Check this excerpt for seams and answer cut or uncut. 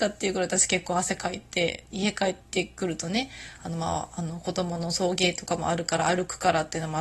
cut